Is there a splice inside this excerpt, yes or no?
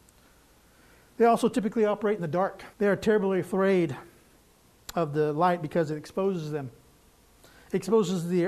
yes